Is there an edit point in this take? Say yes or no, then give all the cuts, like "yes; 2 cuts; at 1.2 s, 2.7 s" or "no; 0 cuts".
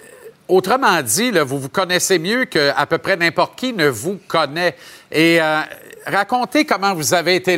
no; 0 cuts